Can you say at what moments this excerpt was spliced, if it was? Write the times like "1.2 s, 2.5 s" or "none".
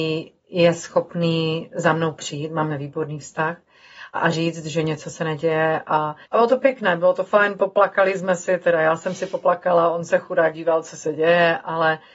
2.7 s, 4.1 s, 6.2 s, 10.5 s